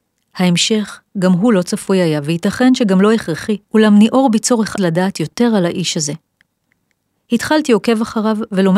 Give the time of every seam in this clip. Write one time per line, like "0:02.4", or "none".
0:03.6
0:04.8